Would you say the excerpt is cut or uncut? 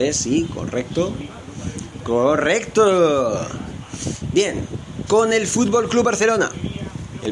cut